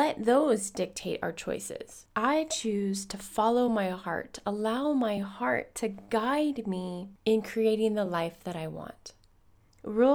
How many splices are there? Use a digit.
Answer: 0